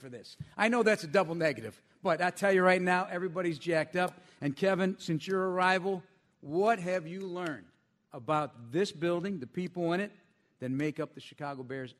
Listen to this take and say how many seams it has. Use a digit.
0